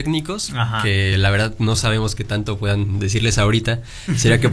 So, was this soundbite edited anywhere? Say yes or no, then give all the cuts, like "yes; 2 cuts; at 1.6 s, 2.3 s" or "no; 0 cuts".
no; 0 cuts